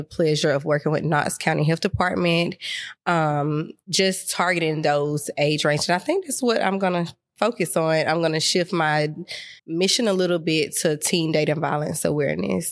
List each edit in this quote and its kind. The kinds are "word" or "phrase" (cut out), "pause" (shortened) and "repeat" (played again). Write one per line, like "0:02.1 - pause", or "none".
0:09.6 - pause